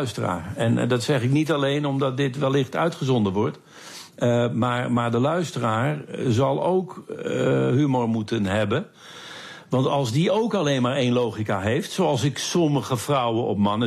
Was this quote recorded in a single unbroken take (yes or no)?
yes